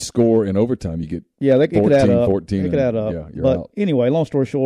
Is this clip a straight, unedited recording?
yes; 0 cuts

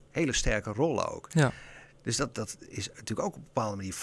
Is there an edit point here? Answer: no; 0 cuts

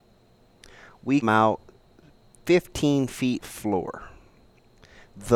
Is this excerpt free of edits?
no; 2 cuts; at 1.2 s, 3.4 s

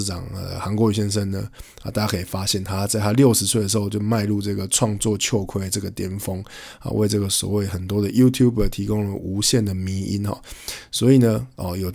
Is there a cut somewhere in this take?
no; 0 cuts

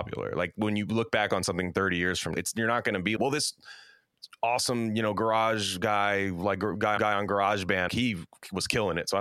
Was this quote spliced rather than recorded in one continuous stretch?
yes; 4 cuts; at 2.3 s, 3.2 s, 7.0 s, 7.9 s

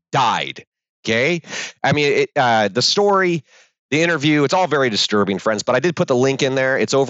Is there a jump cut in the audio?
no; 0 cuts

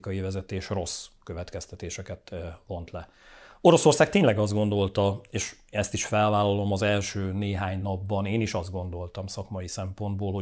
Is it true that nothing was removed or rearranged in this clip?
yes; 0 cuts

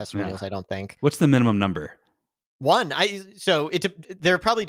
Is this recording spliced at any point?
no; 0 cuts

